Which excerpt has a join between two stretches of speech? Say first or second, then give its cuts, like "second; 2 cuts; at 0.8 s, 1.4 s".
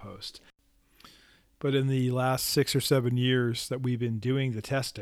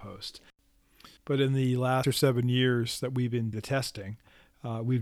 second; 3 cuts; at 1.2 s, 2.0 s, 3.5 s